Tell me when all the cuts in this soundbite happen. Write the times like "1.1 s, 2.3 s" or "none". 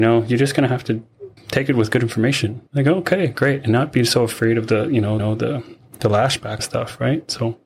1.4 s, 2.7 s, 5.2 s, 6.6 s